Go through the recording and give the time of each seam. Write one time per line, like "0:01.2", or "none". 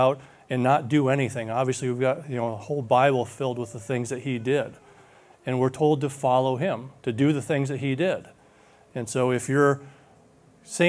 none